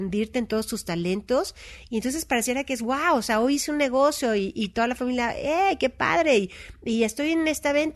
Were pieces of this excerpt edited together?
no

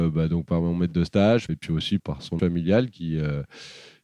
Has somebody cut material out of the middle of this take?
yes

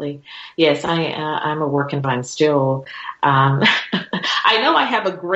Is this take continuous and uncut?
no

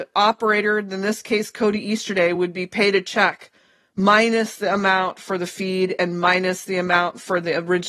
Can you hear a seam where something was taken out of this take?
no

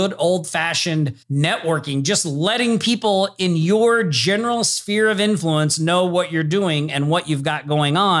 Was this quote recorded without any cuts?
no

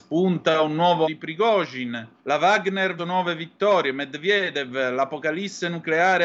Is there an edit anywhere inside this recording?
yes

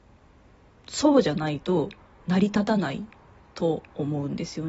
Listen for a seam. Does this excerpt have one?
no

